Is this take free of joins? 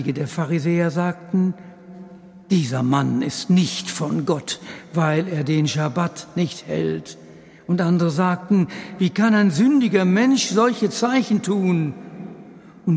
yes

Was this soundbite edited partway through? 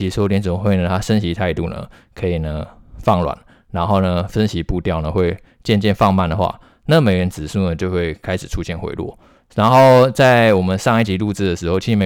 no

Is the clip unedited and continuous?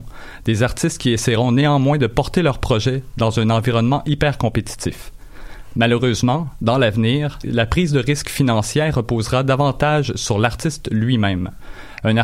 no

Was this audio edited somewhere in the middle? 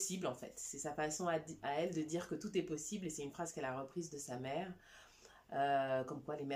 no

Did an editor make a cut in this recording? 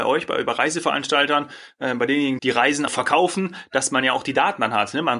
yes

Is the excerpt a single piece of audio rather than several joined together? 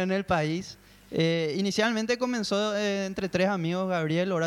yes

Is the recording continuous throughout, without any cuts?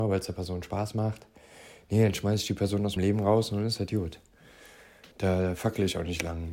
no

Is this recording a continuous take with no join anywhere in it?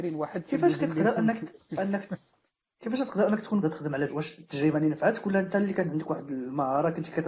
no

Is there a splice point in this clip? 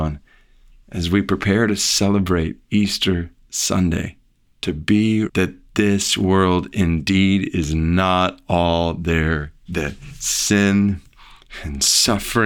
yes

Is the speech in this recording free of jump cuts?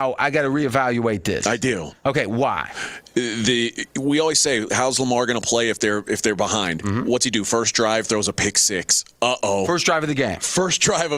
yes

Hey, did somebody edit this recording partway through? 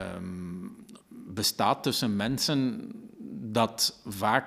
no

